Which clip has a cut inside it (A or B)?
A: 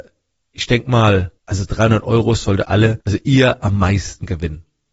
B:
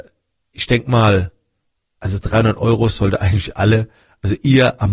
A